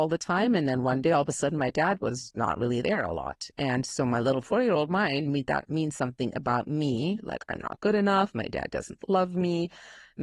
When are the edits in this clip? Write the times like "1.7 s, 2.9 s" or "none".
none